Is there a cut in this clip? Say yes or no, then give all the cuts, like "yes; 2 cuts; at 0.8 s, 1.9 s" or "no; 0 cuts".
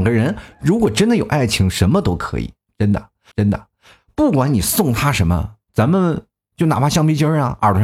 yes; 1 cut; at 3.3 s